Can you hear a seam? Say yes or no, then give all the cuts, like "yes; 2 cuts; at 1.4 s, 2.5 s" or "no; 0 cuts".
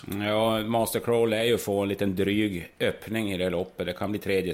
no; 0 cuts